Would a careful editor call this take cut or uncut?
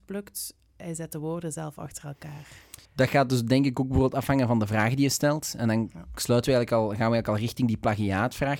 cut